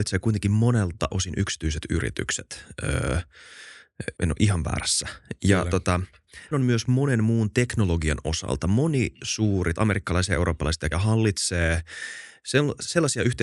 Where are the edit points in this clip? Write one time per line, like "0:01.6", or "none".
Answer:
0:01.1
0:04.2
0:06.5
0:09.8
0:10.9